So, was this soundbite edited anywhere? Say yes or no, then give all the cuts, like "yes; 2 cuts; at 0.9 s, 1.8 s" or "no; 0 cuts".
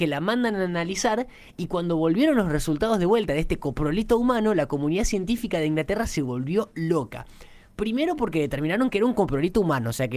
no; 0 cuts